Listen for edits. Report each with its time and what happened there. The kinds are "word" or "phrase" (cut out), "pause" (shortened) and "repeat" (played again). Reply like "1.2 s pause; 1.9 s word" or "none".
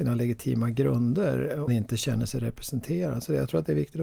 1.7 s phrase